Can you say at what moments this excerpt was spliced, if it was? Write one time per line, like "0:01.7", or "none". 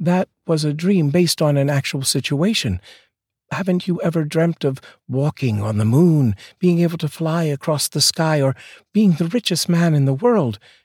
none